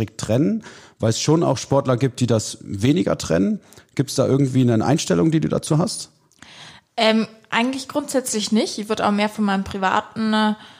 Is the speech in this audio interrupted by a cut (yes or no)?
no